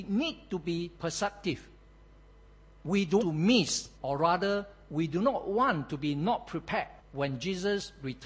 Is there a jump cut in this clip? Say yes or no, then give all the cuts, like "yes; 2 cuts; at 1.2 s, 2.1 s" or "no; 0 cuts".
yes; 4 cuts; at 1.0 s, 3.2 s, 3.9 s, 7.0 s